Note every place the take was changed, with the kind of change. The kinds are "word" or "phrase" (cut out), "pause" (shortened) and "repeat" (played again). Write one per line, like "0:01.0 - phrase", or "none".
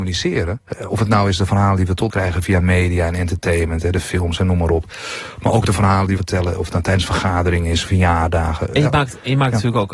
0:02.1 - word
0:06.2 - word